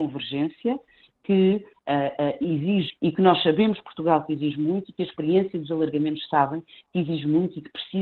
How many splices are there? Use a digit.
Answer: 1